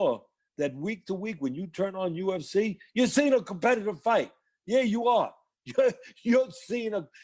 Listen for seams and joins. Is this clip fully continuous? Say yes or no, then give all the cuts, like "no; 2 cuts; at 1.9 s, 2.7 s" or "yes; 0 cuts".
yes; 0 cuts